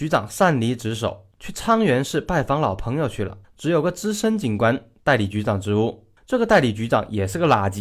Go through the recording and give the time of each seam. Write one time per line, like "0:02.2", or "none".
0:01.3
0:03.4
0:06.2